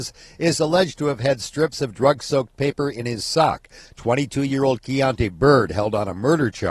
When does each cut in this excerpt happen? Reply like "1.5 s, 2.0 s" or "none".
none